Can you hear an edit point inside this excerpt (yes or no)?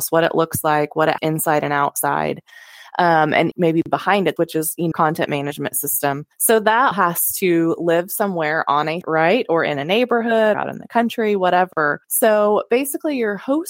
yes